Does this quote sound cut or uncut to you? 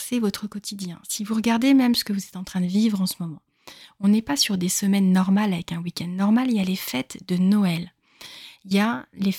uncut